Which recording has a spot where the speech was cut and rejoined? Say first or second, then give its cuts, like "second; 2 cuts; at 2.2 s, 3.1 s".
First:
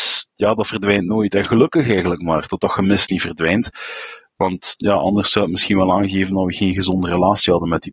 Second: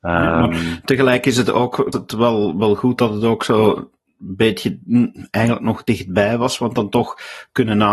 second; 1 cut; at 1.9 s